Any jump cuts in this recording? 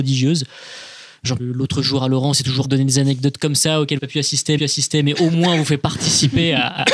yes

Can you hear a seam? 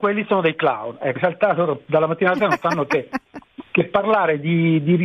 yes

